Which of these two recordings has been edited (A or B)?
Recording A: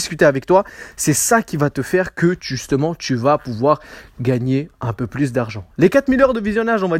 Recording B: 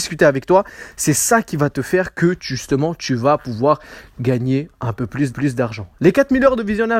B